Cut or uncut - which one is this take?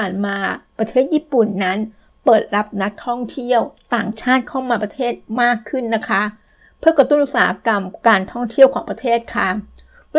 uncut